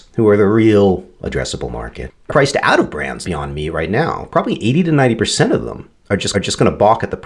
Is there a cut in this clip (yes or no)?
yes